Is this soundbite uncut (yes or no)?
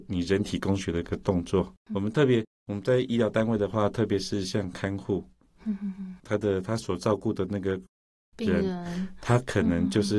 no